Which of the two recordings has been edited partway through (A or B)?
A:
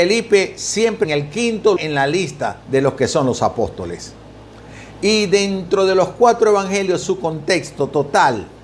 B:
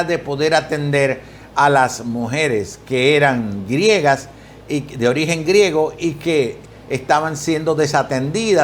A